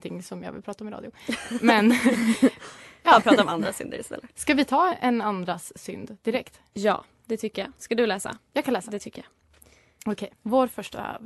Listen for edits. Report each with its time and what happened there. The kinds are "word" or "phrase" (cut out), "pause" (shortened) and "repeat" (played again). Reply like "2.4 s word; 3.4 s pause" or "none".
4.9 s word; 10.3 s pause